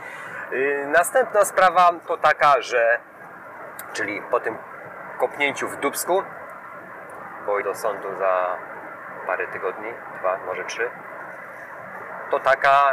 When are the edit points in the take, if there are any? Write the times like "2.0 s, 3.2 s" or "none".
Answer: 7.6 s